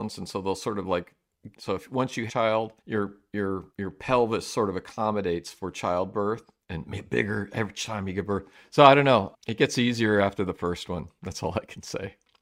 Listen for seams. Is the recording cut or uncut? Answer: cut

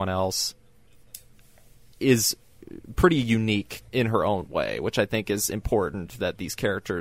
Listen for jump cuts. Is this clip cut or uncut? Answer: cut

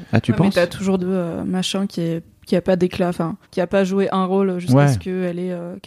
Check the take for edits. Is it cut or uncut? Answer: cut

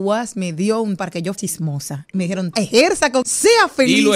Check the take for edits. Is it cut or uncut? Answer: cut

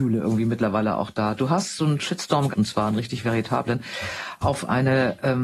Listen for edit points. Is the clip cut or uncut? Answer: cut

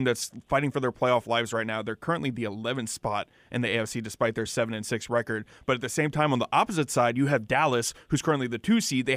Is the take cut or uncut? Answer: uncut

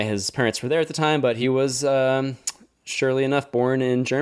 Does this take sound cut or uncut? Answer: uncut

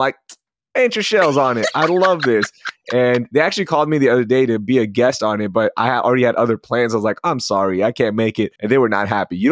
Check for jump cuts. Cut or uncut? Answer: cut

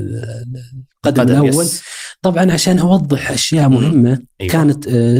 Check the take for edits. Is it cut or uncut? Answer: uncut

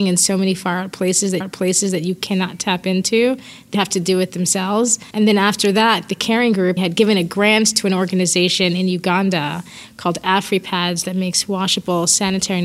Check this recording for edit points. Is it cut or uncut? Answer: cut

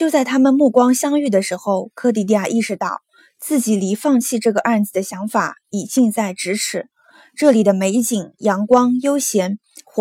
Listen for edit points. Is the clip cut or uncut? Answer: uncut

